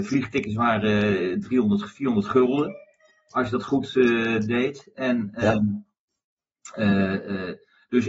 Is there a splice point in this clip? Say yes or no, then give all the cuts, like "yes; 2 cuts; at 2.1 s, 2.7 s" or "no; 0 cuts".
no; 0 cuts